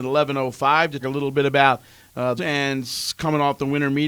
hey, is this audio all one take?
no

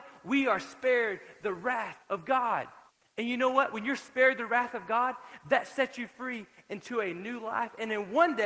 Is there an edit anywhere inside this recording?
yes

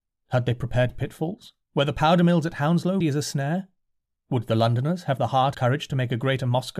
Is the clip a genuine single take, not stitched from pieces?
no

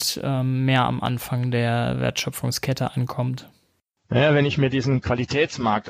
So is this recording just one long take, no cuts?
yes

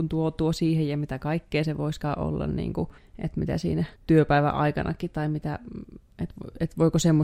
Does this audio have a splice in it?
yes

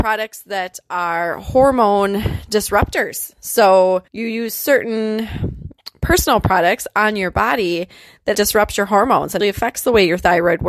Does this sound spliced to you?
yes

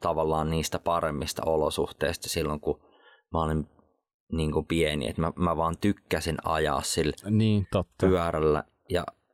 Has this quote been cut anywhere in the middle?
no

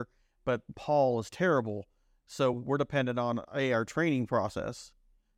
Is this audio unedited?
yes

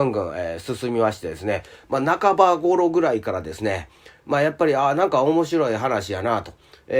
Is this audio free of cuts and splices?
yes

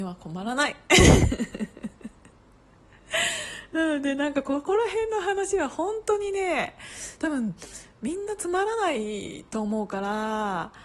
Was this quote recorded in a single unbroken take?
yes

